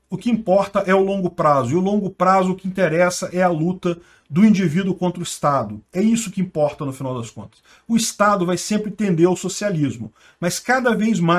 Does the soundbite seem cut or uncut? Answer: uncut